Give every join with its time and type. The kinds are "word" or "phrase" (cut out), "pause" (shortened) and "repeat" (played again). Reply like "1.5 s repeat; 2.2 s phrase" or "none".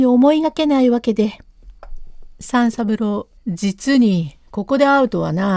3.4 s pause